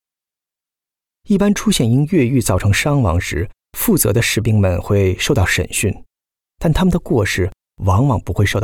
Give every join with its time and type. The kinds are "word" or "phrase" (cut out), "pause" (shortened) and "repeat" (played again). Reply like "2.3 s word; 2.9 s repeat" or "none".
none